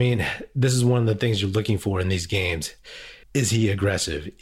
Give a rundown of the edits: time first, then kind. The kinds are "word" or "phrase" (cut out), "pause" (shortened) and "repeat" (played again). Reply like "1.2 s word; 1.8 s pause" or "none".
3.2 s pause